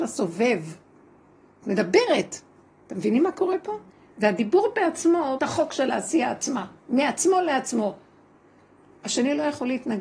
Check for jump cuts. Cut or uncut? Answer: cut